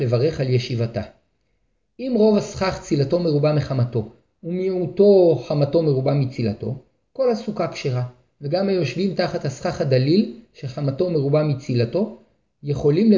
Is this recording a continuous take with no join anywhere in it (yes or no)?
yes